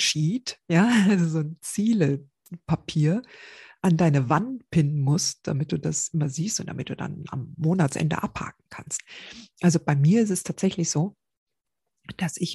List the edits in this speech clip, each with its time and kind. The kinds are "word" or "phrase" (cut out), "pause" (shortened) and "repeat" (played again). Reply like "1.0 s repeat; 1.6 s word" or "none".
none

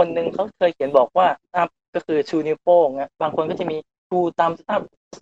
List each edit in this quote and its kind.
1.5 s word

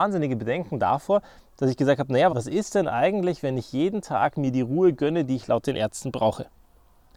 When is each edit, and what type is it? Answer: 2.3 s word

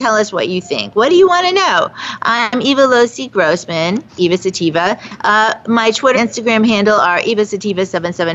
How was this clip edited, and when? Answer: 4.1 s pause; 6.1 s word

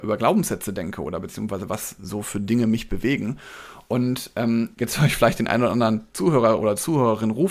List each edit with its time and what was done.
4.7 s pause

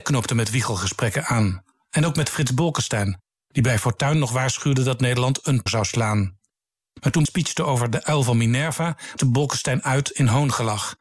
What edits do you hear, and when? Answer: 5.7 s word; 7.3 s word; 9.2 s word

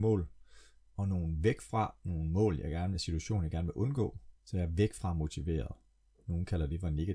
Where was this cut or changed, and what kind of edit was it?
4.4 s pause

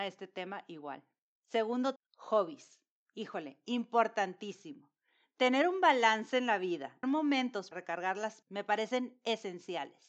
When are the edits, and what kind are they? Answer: 2.0 s word; 7.0 s word; 7.7 s word; 8.4 s word

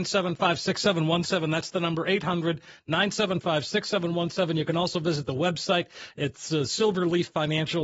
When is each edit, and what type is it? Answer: none

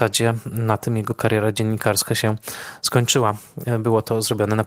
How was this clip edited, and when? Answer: none

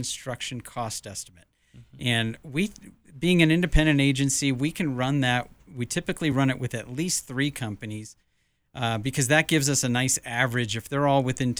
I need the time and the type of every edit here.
none

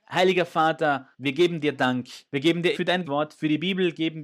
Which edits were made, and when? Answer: 1.1 s pause; 2.3 s pause; 2.7 s word; 3.0 s word

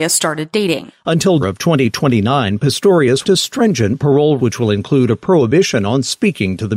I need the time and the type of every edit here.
1.4 s word; 3.2 s phrase; 4.4 s word

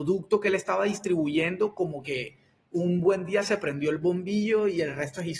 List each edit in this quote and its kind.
none

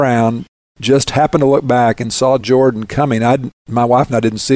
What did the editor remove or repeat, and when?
none

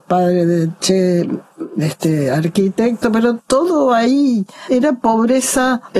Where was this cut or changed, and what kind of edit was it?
3.4 s word

